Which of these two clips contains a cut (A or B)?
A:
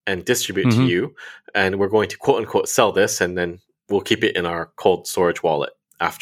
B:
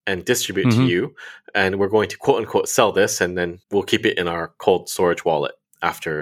B